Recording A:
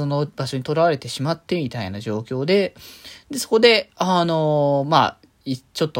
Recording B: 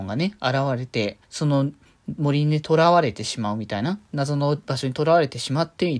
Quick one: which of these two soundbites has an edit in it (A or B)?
B